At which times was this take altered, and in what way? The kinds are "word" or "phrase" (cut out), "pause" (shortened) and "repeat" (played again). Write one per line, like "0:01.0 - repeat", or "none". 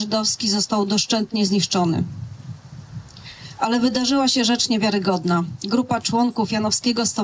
none